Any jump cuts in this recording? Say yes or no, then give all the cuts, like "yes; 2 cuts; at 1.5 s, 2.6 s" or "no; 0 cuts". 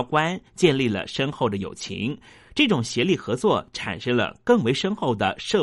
no; 0 cuts